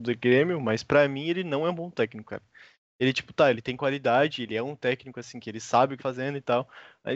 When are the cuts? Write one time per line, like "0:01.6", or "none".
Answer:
0:06.0